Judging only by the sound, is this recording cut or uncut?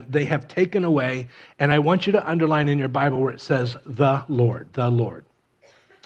uncut